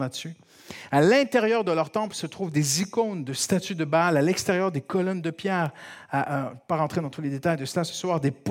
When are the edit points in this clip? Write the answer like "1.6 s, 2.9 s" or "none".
none